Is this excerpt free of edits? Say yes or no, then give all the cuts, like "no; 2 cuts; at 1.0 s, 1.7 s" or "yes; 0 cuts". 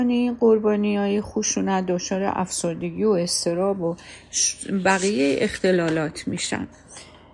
yes; 0 cuts